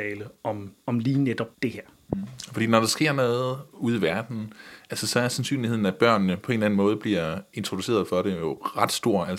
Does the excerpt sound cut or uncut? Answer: cut